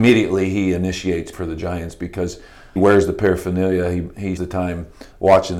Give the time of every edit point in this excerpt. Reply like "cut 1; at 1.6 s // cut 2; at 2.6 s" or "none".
cut 1; at 1.3 s // cut 2; at 2.8 s // cut 3; at 4.4 s